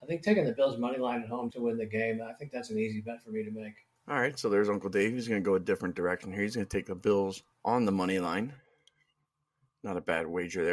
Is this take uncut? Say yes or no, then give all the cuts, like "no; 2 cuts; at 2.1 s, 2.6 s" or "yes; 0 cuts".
no; 3 cuts; at 1.5 s, 4.0 s, 7.5 s